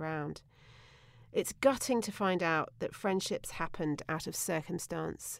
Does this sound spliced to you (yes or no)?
no